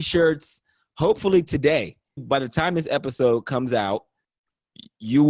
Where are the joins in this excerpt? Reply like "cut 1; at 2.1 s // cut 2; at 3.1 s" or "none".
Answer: cut 1; at 2.2 s